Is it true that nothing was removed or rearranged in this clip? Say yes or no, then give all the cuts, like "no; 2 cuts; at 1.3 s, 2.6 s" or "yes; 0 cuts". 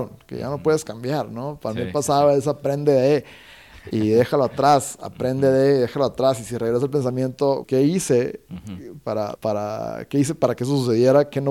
no; 2 cuts; at 7.6 s, 9.4 s